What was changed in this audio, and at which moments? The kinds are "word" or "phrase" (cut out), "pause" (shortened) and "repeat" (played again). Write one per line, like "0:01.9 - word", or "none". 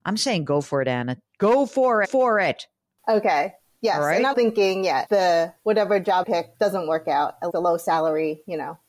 0:02.0 - repeat
0:04.3 - word
0:05.1 - word
0:06.2 - word
0:06.5 - word
0:07.5 - word